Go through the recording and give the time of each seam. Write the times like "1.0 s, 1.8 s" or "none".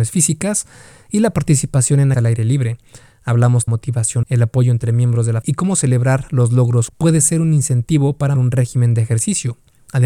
2.1 s, 3.7 s, 4.2 s, 5.4 s, 6.9 s, 8.4 s